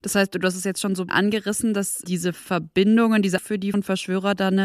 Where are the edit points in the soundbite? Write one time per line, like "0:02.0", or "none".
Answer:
0:01.1
0:02.0
0:03.4
0:03.7